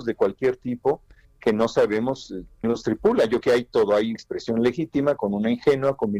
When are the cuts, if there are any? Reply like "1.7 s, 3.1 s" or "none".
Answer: 2.6 s, 3.4 s, 4.2 s, 5.2 s

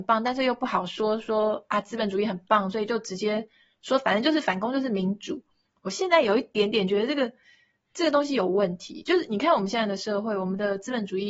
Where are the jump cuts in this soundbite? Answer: none

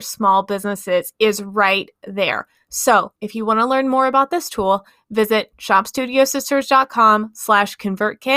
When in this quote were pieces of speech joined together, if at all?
3.2 s

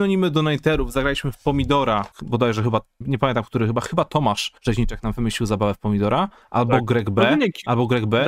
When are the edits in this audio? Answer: 2.1 s, 3.0 s, 4.6 s

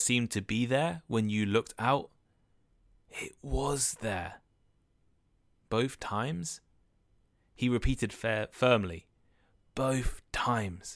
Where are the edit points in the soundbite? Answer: none

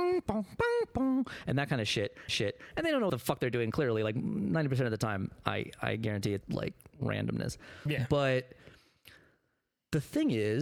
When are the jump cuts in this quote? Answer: 2.3 s, 3.1 s, 6.4 s

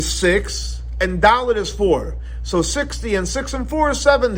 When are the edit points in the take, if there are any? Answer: none

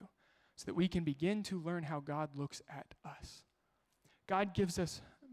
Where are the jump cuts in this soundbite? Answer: 3.0 s

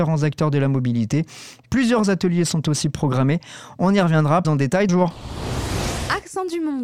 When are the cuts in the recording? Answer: 4.4 s, 4.9 s

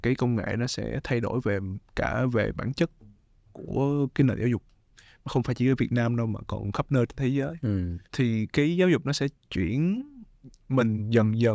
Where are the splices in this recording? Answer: 8.0 s

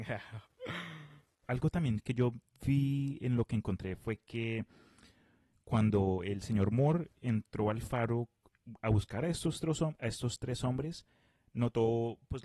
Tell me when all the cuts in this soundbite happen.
none

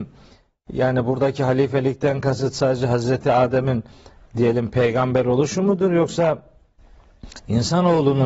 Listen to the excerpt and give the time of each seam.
none

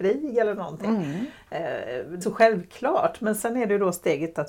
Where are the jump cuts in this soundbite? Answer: 2.2 s

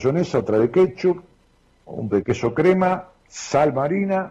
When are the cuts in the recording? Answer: 2.1 s

